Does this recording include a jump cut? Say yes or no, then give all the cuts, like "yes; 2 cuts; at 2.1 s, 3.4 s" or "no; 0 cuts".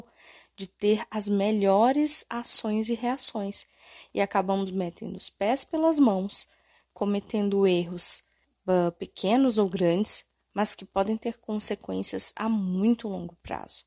yes; 1 cut; at 8.4 s